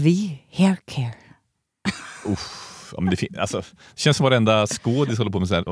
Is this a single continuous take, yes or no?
yes